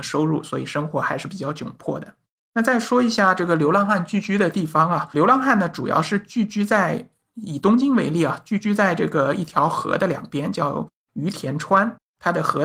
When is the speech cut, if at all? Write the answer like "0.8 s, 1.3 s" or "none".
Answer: none